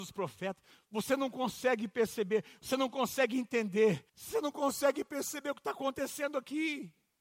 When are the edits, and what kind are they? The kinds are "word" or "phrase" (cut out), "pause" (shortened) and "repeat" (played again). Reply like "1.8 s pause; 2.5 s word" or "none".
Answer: 4.1 s pause